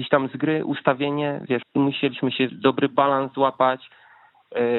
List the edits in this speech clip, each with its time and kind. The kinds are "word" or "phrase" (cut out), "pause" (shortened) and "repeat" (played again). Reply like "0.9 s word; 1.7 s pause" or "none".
1.6 s phrase; 2.5 s word